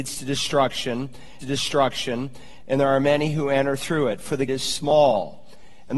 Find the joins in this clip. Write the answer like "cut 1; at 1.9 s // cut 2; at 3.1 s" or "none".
cut 1; at 1.4 s // cut 2; at 4.5 s